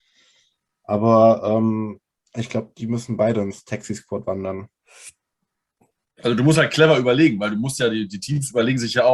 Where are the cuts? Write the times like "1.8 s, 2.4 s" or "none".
none